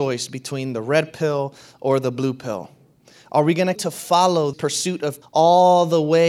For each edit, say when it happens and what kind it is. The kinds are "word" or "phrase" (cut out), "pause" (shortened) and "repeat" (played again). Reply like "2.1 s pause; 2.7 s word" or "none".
3.8 s word; 4.5 s word; 5.2 s word